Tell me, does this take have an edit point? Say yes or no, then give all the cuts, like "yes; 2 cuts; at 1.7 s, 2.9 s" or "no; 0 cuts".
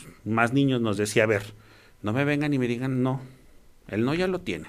no; 0 cuts